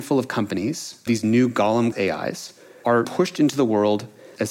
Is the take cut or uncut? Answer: cut